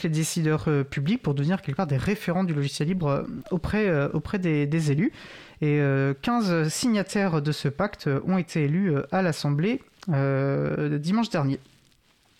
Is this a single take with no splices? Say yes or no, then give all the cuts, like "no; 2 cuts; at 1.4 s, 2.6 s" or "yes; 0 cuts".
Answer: yes; 0 cuts